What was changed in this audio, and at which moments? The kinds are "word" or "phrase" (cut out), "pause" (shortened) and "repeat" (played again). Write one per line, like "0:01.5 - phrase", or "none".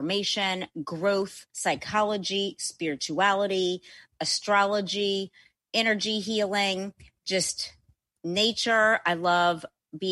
0:01.5 - pause